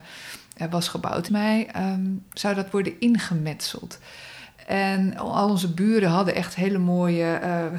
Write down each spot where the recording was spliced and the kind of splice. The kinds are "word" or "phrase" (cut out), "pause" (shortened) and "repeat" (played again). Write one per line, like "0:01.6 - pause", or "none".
0:01.3 - phrase
0:05.2 - word